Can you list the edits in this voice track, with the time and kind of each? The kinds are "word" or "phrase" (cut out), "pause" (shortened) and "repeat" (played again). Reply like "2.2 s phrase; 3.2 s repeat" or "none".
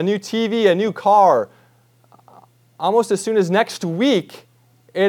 none